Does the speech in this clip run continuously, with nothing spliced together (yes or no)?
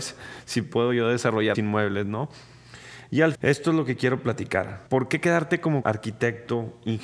no